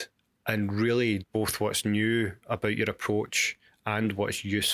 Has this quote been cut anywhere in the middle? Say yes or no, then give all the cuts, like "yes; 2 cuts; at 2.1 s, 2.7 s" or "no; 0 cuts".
yes; 1 cut; at 1.2 s